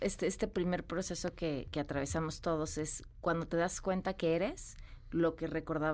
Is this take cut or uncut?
uncut